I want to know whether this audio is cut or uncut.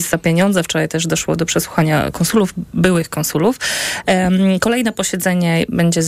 uncut